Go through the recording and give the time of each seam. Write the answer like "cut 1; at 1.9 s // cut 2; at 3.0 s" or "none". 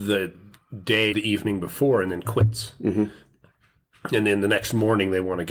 cut 1; at 1.1 s

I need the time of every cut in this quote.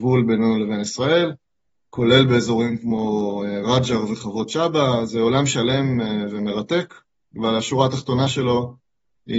none

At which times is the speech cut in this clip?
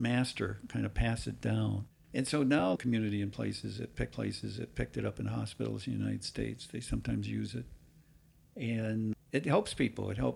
cut 1; at 1.9 s // cut 2; at 2.8 s // cut 3; at 4.1 s // cut 4; at 9.1 s

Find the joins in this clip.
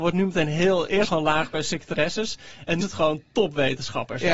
cut 1; at 1.1 s // cut 2; at 2.8 s

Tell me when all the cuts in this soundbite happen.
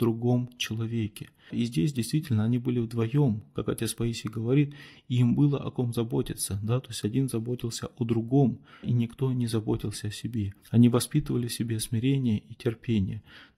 cut 1; at 10.6 s

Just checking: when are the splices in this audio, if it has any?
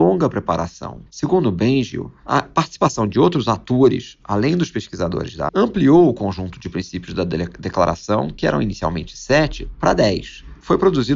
cut 1; at 1.1 s // cut 2; at 5.5 s

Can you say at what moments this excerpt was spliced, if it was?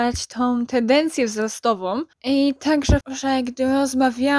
cut 1; at 2.1 s // cut 2; at 3.0 s

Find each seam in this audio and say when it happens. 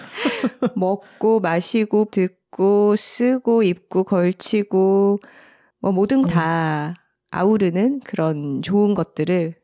cut 1; at 2.1 s // cut 2; at 6.2 s

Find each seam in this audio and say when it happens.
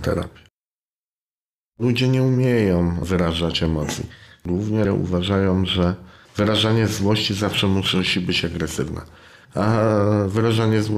cut 1; at 4.8 s

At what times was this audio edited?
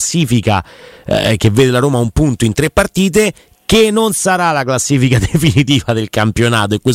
none

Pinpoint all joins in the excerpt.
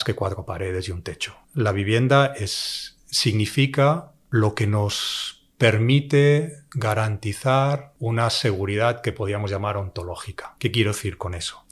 cut 1; at 1.4 s

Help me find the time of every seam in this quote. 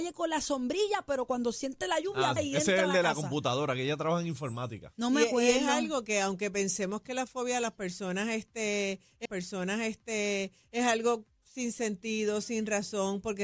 cut 1; at 2.4 s // cut 2; at 9.3 s

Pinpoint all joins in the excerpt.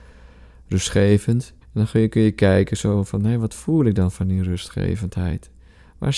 cut 1; at 1.6 s

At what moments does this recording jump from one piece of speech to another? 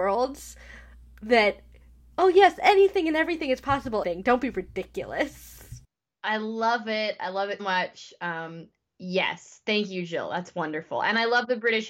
cut 1; at 4.0 s // cut 2; at 7.6 s

